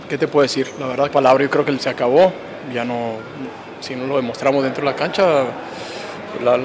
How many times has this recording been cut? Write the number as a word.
two